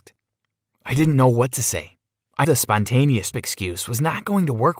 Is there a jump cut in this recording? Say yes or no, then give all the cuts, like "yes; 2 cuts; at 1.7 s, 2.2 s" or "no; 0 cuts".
yes; 2 cuts; at 2.4 s, 3.3 s